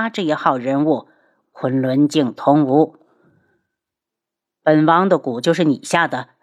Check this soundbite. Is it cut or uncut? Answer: uncut